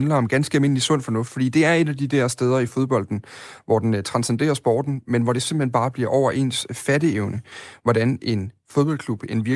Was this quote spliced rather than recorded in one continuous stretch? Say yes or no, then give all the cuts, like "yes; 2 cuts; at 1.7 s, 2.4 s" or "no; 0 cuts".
no; 0 cuts